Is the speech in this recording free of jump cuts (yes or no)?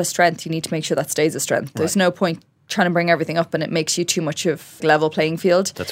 no